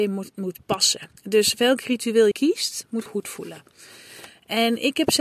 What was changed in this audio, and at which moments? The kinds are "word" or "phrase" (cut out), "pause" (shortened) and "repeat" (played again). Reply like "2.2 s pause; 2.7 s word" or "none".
1.2 s pause; 2.3 s word; 3.1 s phrase